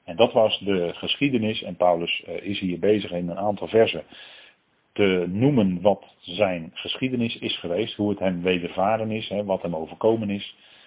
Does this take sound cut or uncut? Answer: uncut